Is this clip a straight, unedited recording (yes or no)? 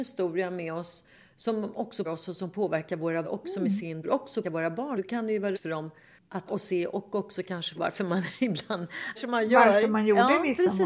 no